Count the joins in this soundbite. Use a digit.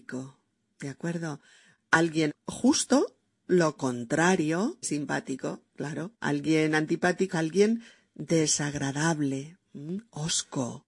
4